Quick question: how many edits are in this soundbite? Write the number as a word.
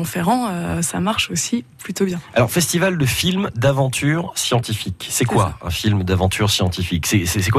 zero